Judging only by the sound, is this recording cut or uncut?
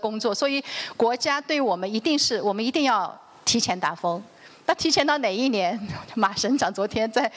uncut